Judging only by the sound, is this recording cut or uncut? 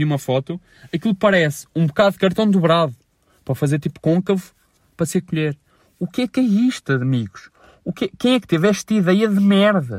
uncut